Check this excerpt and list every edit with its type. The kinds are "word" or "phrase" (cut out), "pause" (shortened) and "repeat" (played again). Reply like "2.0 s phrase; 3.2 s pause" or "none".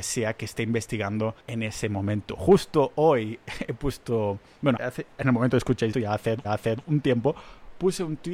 1.4 s pause; 4.8 s word; 5.9 s word; 6.4 s repeat